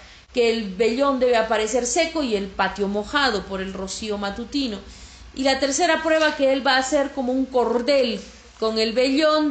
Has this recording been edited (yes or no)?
no